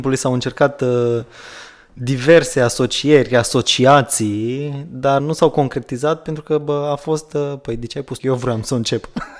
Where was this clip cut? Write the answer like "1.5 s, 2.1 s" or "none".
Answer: 5.2 s, 8.2 s